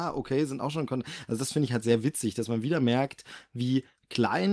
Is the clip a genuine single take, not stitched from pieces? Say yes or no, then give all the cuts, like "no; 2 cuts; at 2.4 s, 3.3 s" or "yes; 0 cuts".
yes; 0 cuts